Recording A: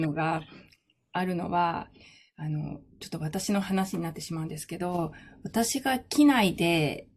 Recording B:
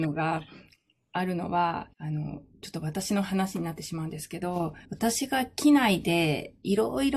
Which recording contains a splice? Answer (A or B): B